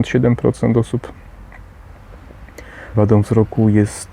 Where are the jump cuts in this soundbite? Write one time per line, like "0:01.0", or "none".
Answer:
0:02.9